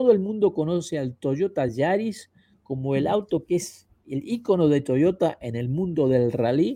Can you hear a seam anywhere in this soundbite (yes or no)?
no